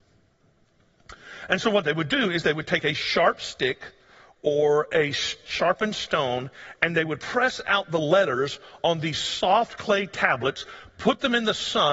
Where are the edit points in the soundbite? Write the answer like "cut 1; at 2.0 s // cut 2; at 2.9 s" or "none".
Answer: none

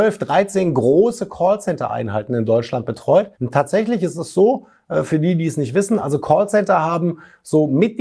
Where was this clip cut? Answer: cut 1; at 3.3 s

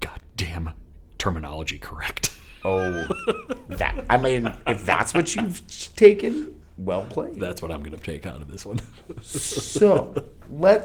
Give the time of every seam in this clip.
none

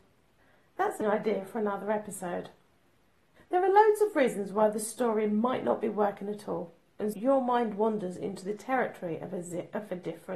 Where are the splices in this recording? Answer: cut 1; at 1.0 s // cut 2; at 7.1 s

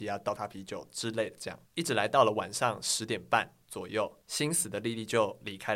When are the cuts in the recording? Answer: cut 1; at 1.7 s // cut 2; at 4.2 s

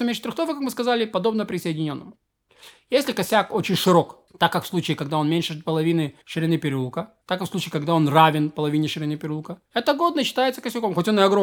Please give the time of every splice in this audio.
cut 1; at 4.3 s // cut 2; at 6.2 s // cut 3; at 7.2 s // cut 4; at 9.7 s

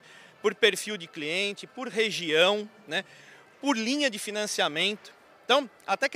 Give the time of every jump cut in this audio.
none

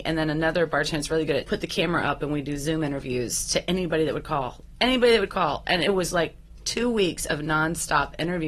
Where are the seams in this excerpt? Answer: cut 1; at 1.4 s

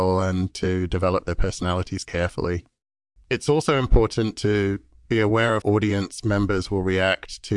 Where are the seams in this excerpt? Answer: cut 1; at 5.6 s

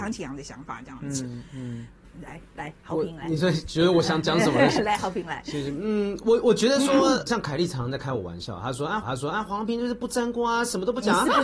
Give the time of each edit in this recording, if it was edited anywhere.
cut 1; at 2.0 s // cut 2; at 7.3 s // cut 3; at 9.0 s

